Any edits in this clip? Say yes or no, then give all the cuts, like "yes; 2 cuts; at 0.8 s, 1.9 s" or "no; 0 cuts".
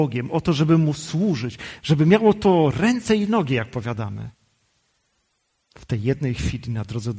no; 0 cuts